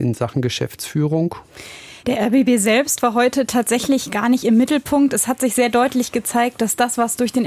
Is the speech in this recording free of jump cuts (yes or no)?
no